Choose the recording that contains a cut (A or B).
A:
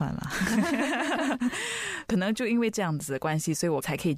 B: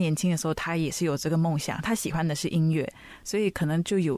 A